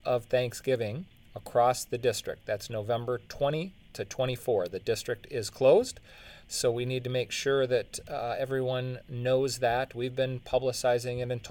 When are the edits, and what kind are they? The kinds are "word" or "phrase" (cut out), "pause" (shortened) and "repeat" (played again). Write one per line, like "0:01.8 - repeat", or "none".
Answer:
none